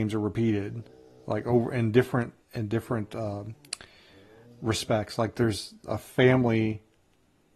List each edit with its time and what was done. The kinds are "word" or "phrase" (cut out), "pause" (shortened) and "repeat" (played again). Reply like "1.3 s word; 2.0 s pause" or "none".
2.4 s pause